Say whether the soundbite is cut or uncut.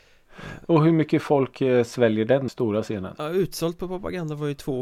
cut